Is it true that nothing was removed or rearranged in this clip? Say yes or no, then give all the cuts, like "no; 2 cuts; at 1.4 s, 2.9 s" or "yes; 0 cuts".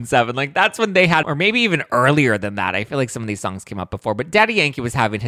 no; 1 cut; at 1.2 s